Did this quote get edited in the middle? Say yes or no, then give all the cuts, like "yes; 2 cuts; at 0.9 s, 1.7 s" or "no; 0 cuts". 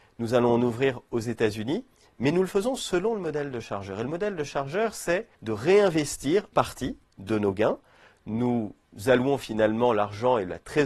yes; 2 cuts; at 5.3 s, 6.5 s